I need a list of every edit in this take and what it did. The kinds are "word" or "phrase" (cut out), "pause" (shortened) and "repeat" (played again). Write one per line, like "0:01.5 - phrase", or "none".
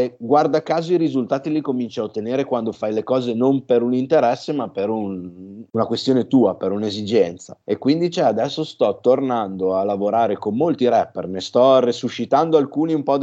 none

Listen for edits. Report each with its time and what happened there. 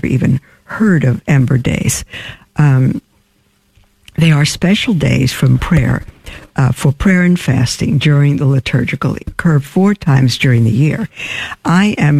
0:09.2 - phrase

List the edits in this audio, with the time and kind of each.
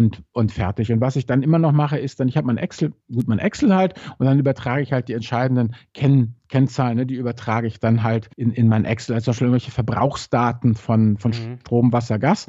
0:03.0 - pause
0:08.3 - pause

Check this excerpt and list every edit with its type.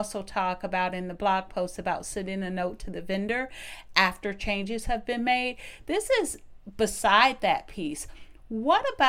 none

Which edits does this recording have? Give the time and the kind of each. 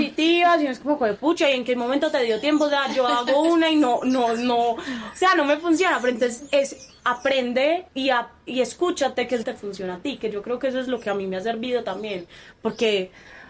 0:07.9 - pause
0:09.4 - phrase

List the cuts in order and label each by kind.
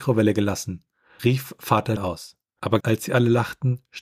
0:02.0 - word
0:02.8 - word

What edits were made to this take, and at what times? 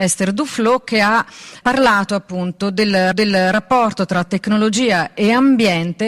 0:01.6 - word
0:03.1 - repeat

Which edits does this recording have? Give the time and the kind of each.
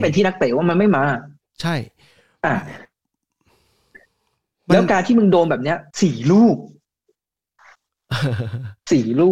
0:05.9 - pause

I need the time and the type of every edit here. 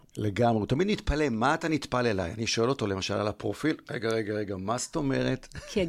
none

